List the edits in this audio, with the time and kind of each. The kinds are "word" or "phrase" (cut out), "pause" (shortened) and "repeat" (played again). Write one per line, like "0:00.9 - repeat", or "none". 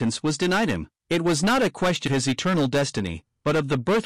0:01.0 - pause
0:02.1 - word

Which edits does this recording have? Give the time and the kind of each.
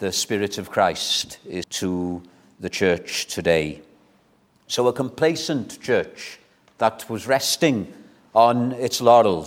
0:01.6 - word

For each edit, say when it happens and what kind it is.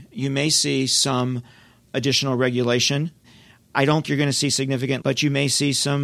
0:04.0 - word
0:05.0 - word

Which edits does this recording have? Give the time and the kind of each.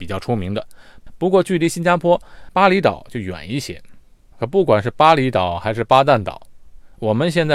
none

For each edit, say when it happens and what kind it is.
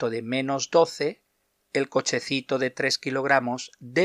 0:01.6 - pause

